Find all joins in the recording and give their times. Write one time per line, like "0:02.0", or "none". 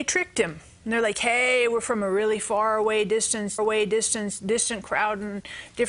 0:03.6